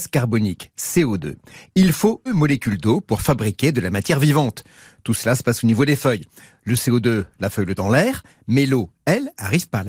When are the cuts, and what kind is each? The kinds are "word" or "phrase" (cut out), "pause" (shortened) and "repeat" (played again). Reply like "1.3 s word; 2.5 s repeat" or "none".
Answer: 2.3 s word; 7.8 s word